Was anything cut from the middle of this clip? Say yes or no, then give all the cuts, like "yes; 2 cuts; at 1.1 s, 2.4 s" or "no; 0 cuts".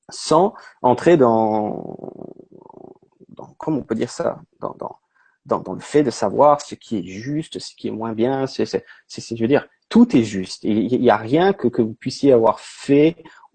no; 0 cuts